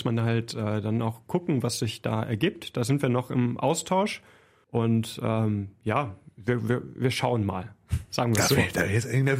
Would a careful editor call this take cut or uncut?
uncut